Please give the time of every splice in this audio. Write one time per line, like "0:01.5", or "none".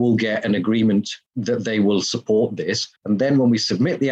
0:01.3
0:03.0